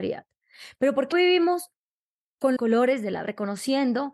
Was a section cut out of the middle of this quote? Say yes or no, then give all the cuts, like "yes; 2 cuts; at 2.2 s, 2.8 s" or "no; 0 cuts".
yes; 3 cuts; at 1.1 s, 2.6 s, 3.2 s